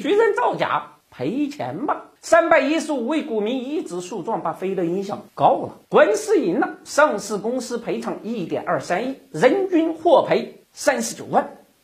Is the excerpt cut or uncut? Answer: cut